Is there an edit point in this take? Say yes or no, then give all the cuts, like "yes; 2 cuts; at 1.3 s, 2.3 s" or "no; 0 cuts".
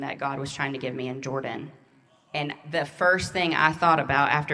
no; 0 cuts